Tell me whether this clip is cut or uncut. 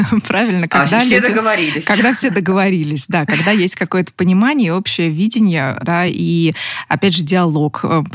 uncut